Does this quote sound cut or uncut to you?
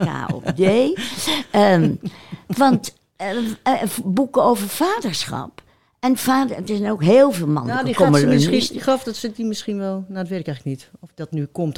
uncut